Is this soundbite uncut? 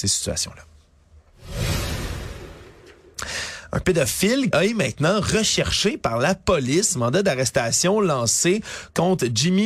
no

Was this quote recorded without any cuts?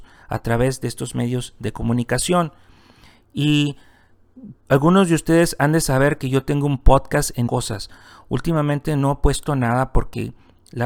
no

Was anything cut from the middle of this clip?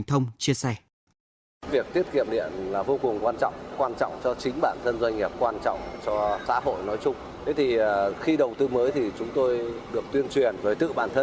no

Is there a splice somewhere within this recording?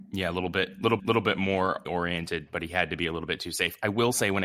yes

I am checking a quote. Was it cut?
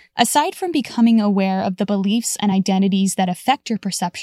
no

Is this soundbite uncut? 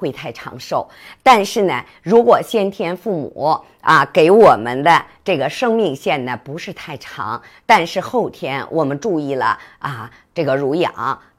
yes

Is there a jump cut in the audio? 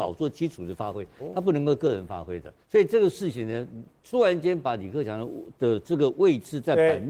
yes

